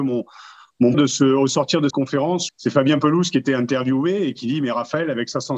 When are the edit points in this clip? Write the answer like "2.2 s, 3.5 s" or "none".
0.9 s, 1.9 s, 2.5 s

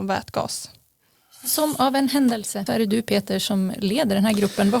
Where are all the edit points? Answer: 2.7 s

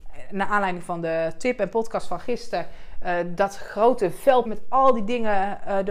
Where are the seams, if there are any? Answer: 4.5 s

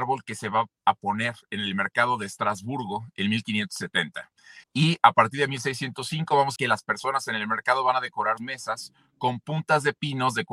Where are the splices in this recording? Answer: 4.6 s, 6.6 s, 8.4 s

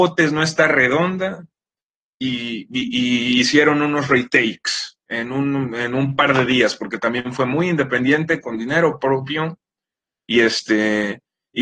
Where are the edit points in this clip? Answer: none

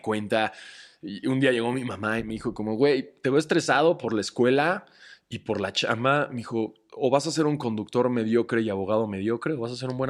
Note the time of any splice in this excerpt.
none

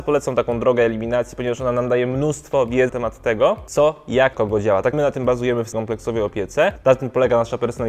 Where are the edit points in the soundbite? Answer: 2.9 s, 4.3 s, 4.9 s, 5.7 s

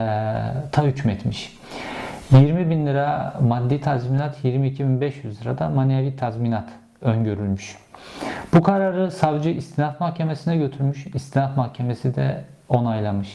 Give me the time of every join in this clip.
none

